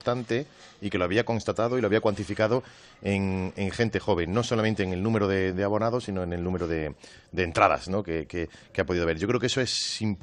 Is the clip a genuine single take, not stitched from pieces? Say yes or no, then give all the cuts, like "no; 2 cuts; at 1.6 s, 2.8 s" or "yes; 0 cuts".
yes; 0 cuts